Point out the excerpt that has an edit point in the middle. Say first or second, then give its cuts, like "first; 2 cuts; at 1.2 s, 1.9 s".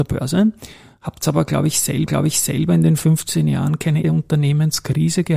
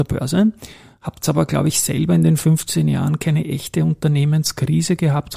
first; 2 cuts; at 2.1 s, 4.0 s